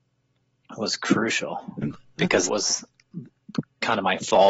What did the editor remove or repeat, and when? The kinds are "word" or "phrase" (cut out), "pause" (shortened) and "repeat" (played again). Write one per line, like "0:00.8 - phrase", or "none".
0:02.5 - word